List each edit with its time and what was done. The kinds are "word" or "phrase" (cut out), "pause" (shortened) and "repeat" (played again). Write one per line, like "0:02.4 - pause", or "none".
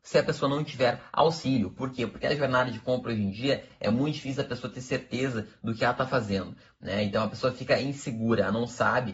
none